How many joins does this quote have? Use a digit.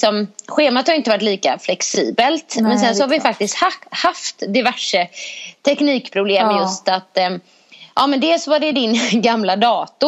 0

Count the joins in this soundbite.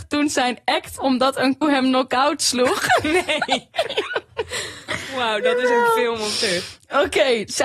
2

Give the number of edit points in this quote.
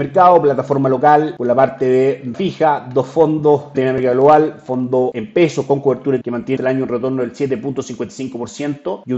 4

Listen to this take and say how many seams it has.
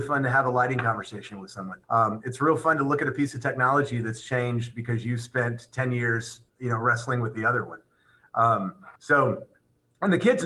3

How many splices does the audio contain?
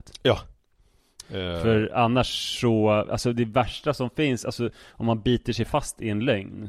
0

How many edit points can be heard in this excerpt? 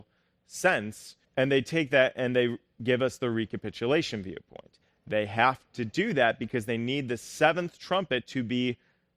1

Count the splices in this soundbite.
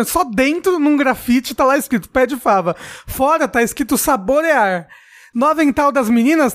0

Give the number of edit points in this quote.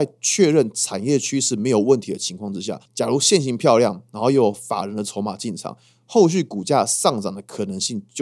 1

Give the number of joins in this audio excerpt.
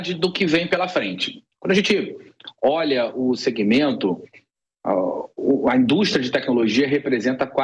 0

